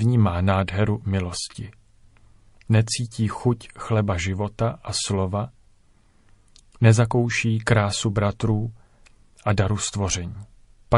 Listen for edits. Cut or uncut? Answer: uncut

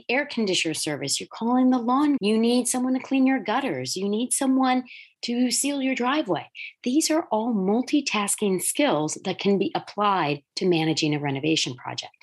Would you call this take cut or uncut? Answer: cut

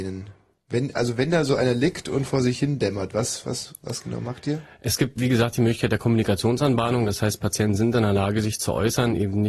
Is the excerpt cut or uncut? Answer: uncut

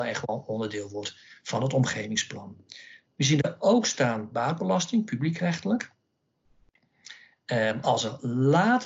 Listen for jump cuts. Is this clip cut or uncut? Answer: uncut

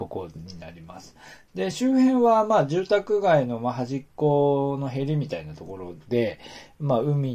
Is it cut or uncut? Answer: uncut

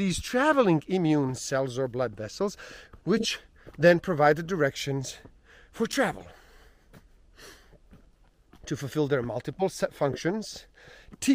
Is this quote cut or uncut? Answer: uncut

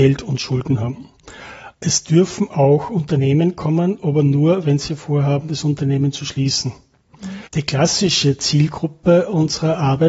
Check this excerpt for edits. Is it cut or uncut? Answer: cut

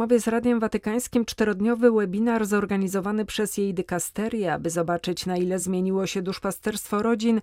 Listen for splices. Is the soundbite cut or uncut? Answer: uncut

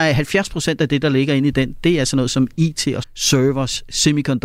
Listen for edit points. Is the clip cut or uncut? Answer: cut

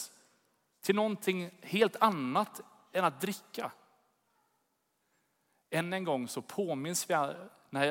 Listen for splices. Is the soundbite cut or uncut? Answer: uncut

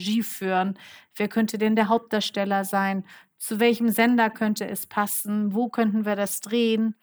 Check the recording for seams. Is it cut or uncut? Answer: uncut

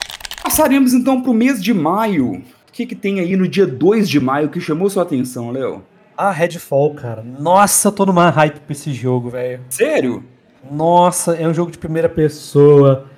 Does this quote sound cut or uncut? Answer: uncut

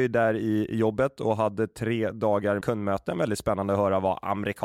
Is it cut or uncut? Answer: cut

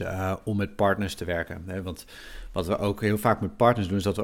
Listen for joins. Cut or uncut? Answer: uncut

